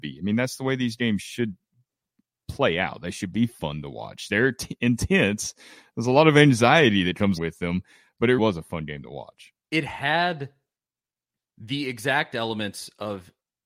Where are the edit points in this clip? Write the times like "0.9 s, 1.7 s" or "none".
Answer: 7.4 s, 8.4 s